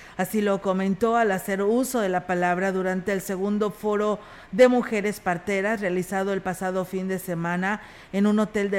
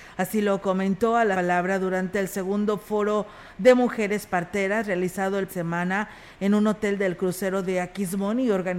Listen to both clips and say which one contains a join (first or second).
second